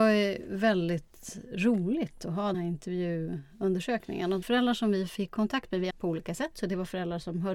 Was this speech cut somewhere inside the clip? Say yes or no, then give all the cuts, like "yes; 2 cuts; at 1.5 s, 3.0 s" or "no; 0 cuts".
yes; 3 cuts; at 2.5 s, 4.4 s, 5.9 s